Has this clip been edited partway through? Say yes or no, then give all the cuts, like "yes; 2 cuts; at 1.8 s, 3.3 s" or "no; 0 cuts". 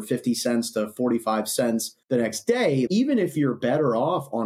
yes; 2 cuts; at 2.0 s, 2.9 s